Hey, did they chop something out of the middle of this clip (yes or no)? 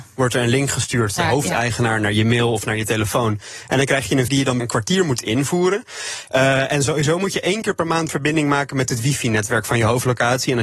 yes